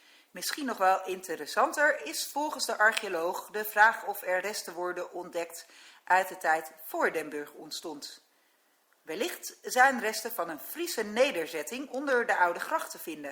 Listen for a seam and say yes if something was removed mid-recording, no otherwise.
no